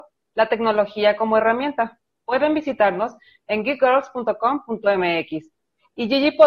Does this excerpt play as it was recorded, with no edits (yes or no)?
yes